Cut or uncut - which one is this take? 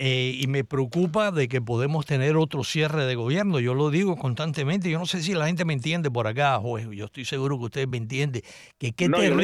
uncut